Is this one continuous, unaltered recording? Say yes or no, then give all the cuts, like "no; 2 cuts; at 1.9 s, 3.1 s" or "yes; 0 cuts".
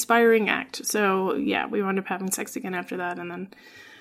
yes; 0 cuts